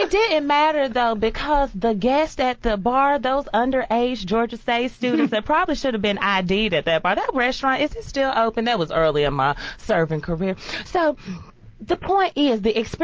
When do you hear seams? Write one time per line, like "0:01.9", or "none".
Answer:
none